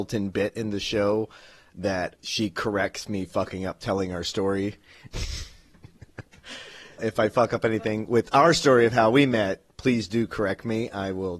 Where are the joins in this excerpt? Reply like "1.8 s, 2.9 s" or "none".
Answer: 2.1 s, 7.0 s